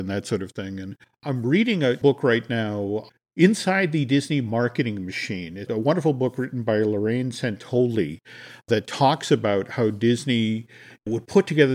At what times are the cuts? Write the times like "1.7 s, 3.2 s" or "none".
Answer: 1.0 s, 5.7 s